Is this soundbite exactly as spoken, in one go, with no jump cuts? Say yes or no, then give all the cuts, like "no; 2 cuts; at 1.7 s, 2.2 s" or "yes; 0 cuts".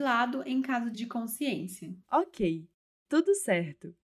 no; 2 cuts; at 0.9 s, 2.0 s